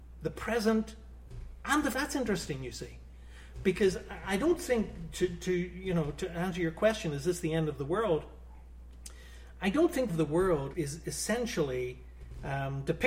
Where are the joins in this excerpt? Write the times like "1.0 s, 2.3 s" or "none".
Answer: 1.9 s, 10.1 s, 10.7 s